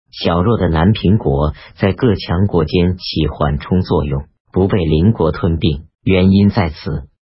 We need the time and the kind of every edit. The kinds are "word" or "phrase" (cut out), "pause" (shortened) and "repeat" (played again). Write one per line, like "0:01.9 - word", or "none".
0:04.4 - pause
0:05.9 - pause